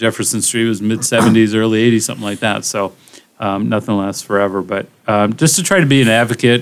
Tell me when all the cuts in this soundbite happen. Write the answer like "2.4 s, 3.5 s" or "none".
none